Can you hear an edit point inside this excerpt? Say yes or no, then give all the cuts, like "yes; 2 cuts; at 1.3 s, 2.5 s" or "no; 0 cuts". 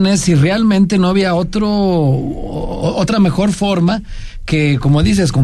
no; 0 cuts